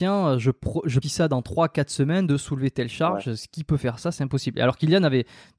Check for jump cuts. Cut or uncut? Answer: cut